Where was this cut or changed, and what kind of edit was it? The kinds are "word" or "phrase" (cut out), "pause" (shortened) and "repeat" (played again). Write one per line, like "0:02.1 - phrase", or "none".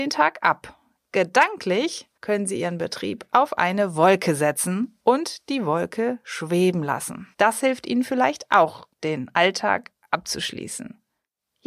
0:02.2 - pause
0:07.3 - pause
0:08.9 - pause